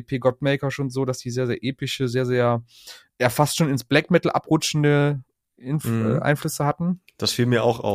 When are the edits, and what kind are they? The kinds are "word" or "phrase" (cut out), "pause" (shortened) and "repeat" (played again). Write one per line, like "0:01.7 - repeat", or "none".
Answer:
none